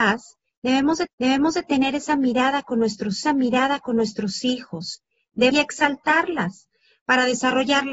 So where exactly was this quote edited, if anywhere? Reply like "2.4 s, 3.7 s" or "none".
1.1 s, 3.2 s, 5.5 s